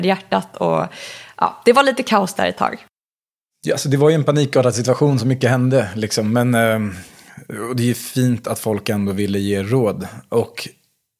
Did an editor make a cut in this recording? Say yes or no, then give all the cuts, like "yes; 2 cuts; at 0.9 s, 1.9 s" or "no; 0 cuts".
no; 0 cuts